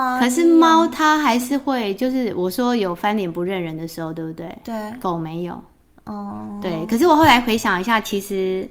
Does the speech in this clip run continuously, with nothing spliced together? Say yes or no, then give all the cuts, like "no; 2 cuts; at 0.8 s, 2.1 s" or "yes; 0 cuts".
yes; 0 cuts